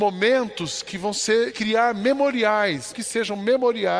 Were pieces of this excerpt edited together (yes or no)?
yes